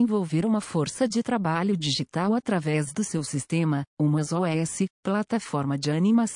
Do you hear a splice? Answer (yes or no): yes